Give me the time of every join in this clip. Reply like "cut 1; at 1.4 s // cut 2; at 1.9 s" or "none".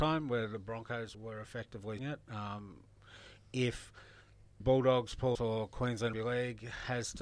cut 1; at 1.1 s // cut 2; at 2.0 s // cut 3; at 4.6 s // cut 4; at 5.3 s // cut 5; at 6.1 s